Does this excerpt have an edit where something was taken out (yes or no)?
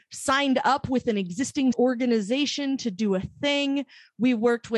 yes